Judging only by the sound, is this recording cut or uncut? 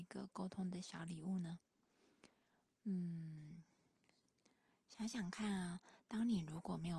uncut